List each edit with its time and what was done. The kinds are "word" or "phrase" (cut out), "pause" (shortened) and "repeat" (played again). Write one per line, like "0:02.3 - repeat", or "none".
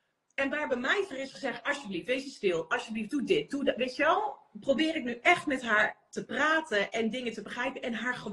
0:01.1 - word